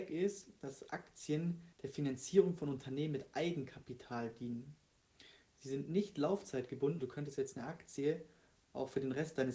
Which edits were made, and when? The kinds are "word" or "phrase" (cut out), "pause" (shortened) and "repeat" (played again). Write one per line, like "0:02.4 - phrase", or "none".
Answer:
0:01.7 - pause
0:07.0 - word